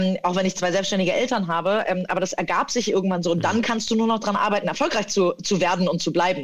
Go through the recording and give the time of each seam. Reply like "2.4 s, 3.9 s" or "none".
none